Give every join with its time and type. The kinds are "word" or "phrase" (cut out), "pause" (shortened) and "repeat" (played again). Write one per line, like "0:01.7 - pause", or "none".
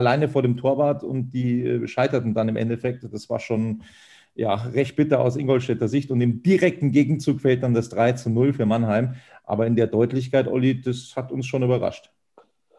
none